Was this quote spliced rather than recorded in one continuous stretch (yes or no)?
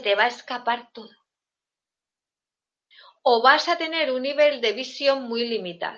no